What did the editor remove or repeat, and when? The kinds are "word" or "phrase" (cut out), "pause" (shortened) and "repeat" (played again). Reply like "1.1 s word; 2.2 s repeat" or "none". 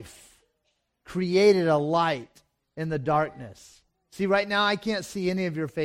none